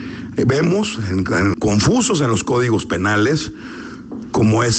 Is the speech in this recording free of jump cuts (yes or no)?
no